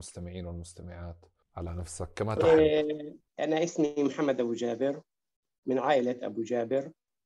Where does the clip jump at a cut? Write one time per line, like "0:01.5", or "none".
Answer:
0:01.4
0:03.3